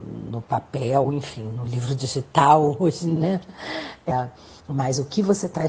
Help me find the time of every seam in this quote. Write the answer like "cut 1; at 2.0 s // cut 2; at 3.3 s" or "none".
cut 1; at 1.0 s // cut 2; at 3.2 s // cut 3; at 4.6 s